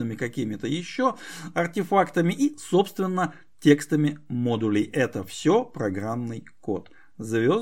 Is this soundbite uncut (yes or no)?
yes